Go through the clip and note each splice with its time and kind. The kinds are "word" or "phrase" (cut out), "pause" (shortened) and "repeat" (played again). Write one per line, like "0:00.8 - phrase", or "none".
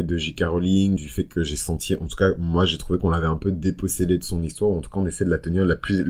0:01.0 - word